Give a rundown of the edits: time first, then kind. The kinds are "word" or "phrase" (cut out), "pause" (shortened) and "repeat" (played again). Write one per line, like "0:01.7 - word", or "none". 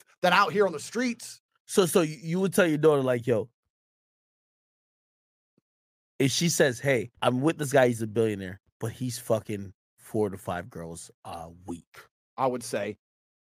0:07.2 - pause
0:08.6 - pause
0:11.1 - pause